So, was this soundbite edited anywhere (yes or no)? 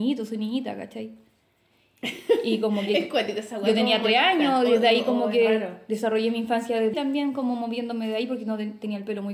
yes